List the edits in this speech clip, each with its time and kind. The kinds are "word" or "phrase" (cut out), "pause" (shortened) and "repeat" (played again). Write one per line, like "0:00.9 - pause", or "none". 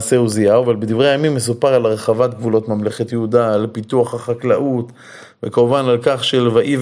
none